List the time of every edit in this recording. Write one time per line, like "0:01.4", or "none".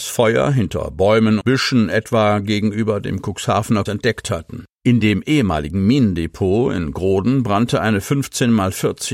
0:01.4
0:03.9
0:04.7